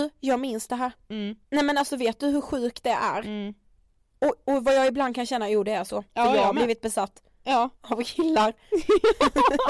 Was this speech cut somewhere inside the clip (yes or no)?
yes